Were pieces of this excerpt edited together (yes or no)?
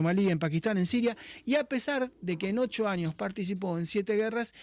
no